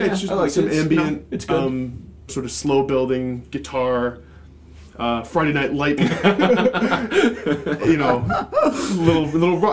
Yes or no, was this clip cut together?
yes